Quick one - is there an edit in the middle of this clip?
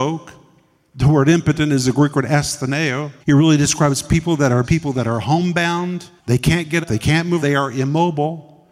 yes; 5 cuts; at 3.2 s, 4.6 s, 6.2 s, 6.8 s, 7.4 s

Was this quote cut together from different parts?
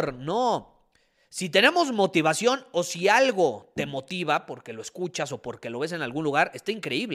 no; 0 cuts

